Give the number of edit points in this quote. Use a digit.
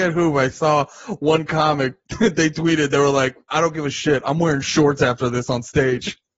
0